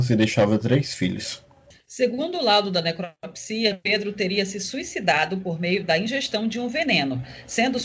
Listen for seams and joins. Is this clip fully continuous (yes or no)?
yes